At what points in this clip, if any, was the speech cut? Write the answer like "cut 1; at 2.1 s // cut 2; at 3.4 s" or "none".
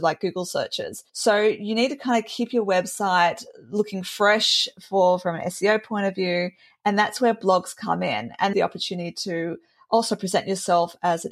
cut 1; at 1.1 s // cut 2; at 8.5 s

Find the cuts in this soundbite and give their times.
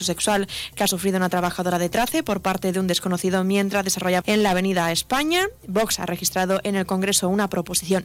cut 1; at 4.2 s

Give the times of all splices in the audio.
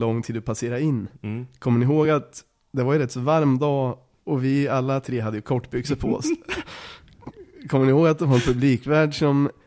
none

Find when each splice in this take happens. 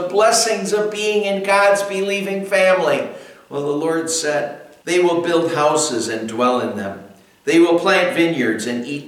cut 1; at 4.8 s

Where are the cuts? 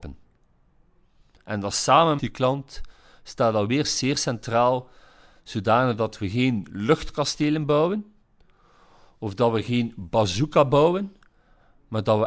cut 1; at 2.2 s

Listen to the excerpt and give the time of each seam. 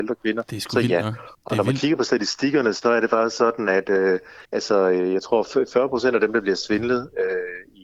cut 1; at 1.3 s // cut 2; at 4.4 s

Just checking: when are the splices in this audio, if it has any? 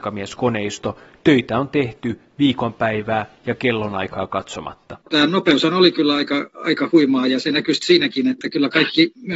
cut 1; at 5.0 s // cut 2; at 6.5 s

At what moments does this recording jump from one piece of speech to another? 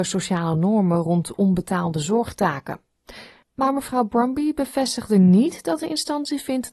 none

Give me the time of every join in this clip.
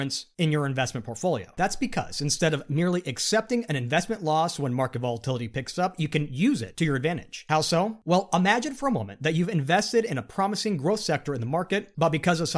none

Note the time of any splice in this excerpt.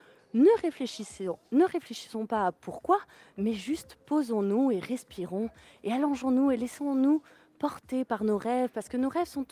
none

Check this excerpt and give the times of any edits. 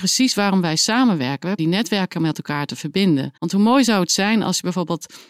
cut 1; at 1.6 s // cut 2; at 3.4 s

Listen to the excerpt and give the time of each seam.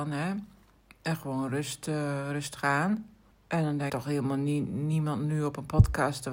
cut 1; at 3.3 s // cut 2; at 3.9 s

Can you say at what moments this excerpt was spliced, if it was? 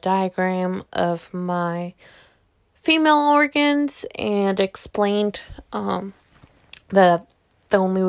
none

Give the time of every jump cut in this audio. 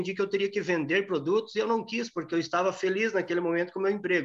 none

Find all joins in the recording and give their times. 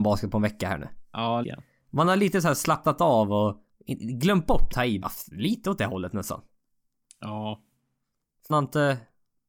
cut 1; at 1.4 s // cut 2; at 4.7 s // cut 3; at 5.0 s // cut 4; at 8.5 s

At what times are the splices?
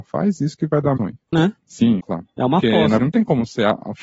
cut 1; at 1.0 s // cut 2; at 1.3 s // cut 3; at 2.0 s // cut 4; at 3.0 s

